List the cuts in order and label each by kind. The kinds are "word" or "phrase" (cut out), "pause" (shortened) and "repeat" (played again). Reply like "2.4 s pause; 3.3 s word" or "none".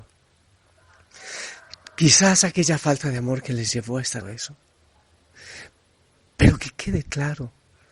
4.2 s word